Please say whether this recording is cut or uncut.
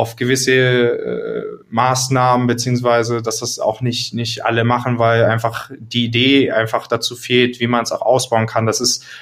cut